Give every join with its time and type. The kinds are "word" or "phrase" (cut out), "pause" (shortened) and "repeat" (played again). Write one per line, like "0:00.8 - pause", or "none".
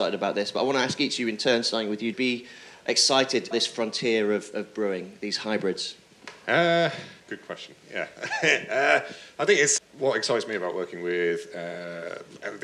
0:02.1 - phrase
0:03.5 - word
0:07.2 - pause
0:07.8 - pause
0:09.8 - word